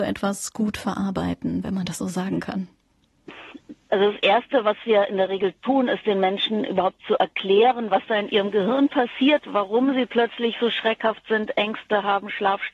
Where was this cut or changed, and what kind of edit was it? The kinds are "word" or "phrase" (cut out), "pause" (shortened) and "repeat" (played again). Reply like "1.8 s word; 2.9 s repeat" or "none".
none